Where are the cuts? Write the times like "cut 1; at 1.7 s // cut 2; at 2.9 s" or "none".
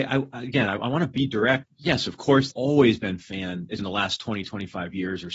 cut 1; at 1.6 s // cut 2; at 2.5 s // cut 3; at 3.8 s